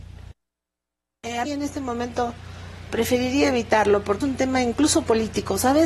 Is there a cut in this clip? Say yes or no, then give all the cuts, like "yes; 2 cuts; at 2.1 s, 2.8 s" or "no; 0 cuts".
yes; 3 cuts; at 1.5 s, 2.9 s, 4.2 s